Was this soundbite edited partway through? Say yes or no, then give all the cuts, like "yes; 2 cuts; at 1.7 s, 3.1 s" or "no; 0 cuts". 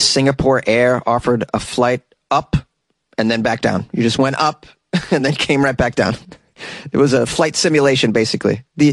no; 0 cuts